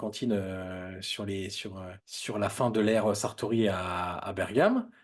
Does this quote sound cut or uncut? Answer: cut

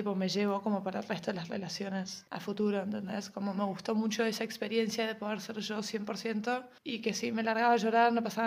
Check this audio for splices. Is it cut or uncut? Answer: uncut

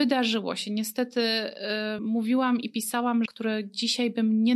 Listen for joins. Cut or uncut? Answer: cut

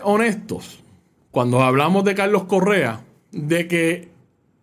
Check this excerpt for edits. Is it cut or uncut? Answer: uncut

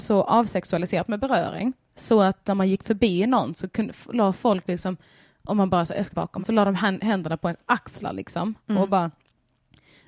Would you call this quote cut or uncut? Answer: cut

